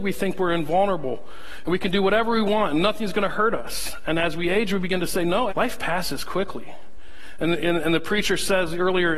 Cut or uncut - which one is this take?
cut